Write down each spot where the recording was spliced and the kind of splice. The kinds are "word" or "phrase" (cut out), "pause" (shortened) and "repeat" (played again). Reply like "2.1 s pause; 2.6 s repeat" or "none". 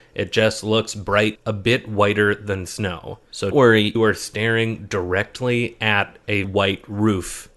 1.4 s word; 3.5 s word; 4.0 s phrase; 6.4 s word